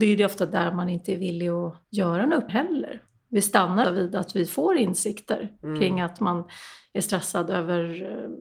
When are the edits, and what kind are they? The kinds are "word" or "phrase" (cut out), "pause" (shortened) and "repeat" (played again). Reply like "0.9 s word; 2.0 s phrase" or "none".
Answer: 1.8 s pause; 2.5 s word; 3.1 s pause; 3.8 s word; 6.2 s phrase